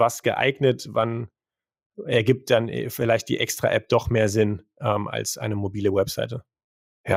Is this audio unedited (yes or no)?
yes